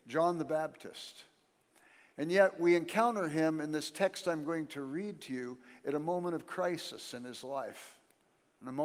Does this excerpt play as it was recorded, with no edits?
yes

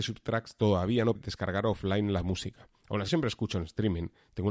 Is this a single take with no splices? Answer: no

